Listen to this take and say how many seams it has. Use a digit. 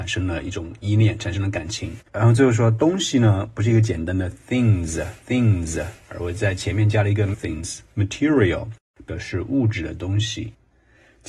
3